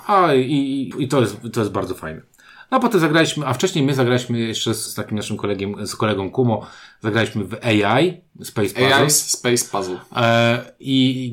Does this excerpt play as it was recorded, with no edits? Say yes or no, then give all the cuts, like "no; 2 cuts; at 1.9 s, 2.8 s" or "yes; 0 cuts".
no; 2 cuts; at 0.9 s, 4.9 s